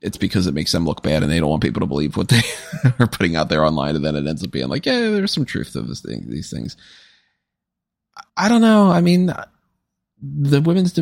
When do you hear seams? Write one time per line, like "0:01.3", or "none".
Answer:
0:08.3

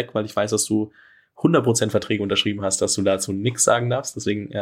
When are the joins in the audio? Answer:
none

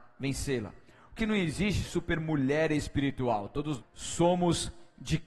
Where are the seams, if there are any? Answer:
0:01.2
0:01.8
0:03.8

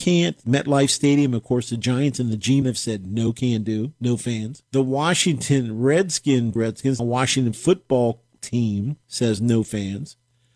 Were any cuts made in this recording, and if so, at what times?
0:02.6
0:04.7
0:06.6
0:07.0
0:09.0

